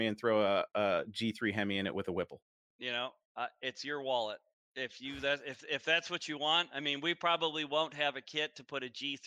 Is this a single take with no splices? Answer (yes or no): yes